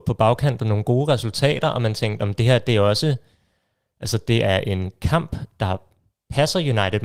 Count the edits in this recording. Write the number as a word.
zero